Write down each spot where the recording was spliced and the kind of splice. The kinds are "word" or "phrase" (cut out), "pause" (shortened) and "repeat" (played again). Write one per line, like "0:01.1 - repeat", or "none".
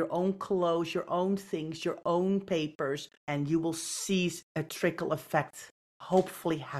0:03.2 - pause
0:04.4 - pause